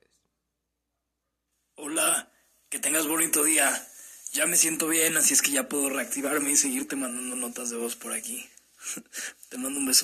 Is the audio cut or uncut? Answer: uncut